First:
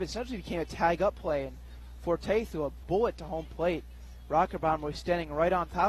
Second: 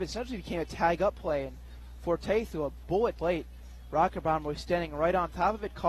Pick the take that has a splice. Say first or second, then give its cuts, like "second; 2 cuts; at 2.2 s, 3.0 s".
second; 1 cut; at 3.2 s